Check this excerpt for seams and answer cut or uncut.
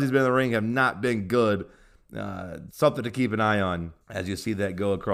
cut